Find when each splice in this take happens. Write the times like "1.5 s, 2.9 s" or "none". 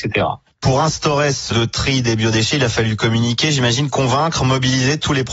1.5 s